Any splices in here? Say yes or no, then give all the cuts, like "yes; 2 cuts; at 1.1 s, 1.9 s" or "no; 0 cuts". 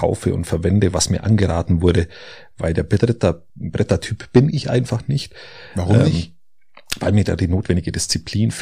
yes; 1 cut; at 3.5 s